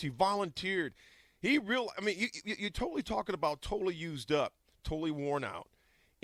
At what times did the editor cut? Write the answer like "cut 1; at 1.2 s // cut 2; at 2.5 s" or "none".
none